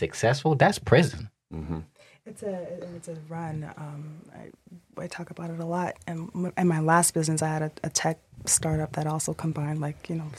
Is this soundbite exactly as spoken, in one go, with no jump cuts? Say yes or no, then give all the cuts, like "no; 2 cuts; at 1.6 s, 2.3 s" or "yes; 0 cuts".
yes; 0 cuts